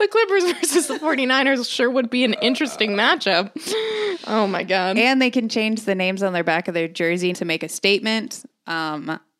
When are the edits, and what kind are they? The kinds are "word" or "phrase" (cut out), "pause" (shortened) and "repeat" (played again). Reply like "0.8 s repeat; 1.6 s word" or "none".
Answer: 7.3 s word